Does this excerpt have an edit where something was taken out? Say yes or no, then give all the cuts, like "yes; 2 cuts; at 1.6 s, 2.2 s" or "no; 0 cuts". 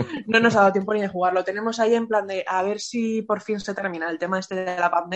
no; 0 cuts